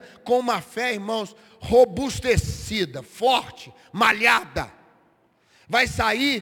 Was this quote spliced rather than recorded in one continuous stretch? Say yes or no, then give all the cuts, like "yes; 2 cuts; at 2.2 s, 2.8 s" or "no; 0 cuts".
no; 0 cuts